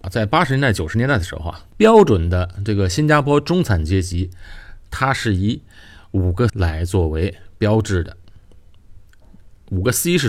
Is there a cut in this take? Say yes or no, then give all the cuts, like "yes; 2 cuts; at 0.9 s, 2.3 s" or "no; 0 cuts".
yes; 2 cuts; at 1.7 s, 6.5 s